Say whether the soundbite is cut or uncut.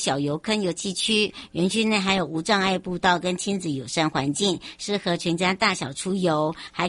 uncut